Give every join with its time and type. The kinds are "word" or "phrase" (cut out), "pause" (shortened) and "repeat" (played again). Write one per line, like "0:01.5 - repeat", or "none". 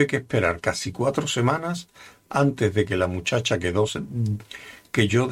none